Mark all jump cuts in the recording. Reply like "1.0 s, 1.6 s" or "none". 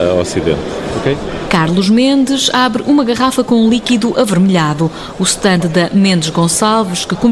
none